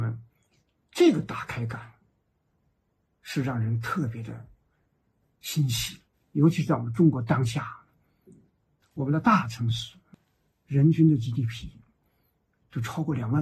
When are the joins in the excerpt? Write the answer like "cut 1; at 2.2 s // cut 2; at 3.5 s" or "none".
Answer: cut 1; at 6.1 s